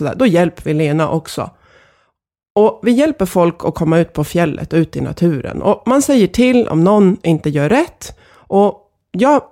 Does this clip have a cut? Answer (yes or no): no